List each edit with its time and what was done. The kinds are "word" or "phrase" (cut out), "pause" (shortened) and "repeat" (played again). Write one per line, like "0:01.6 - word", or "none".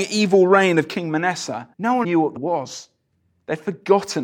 0:01.7 - pause
0:02.0 - word
0:02.4 - word